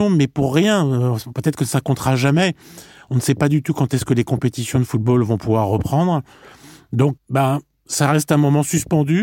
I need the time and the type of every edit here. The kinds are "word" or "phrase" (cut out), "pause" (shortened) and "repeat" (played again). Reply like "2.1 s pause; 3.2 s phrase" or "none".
7.2 s word

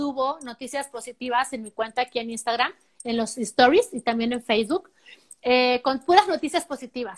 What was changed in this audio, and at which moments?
none

